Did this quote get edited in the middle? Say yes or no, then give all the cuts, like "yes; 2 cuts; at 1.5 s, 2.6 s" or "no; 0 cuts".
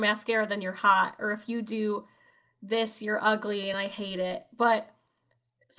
no; 0 cuts